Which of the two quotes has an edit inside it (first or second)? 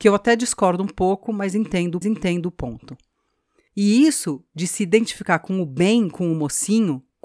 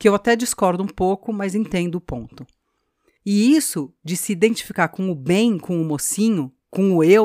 first